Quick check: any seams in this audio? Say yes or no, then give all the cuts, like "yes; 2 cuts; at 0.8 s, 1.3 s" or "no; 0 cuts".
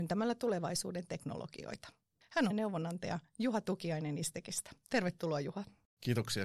yes; 1 cut; at 2.5 s